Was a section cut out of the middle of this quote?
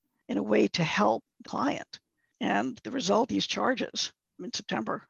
yes; 2 cuts; at 1.4 s, 3.3 s

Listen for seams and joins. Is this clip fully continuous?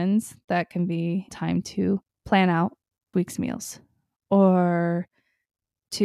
no; 3 cuts; at 1.3 s, 2.1 s, 3.1 s

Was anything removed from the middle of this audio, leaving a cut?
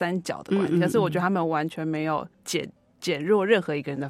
yes; 1 cut; at 2.3 s

